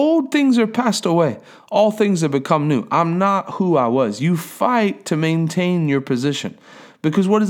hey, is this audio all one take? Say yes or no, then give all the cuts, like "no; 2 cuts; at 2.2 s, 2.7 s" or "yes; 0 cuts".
yes; 0 cuts